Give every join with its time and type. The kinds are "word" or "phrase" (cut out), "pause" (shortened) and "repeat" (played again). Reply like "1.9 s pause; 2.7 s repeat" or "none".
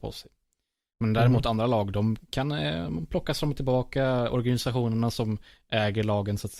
none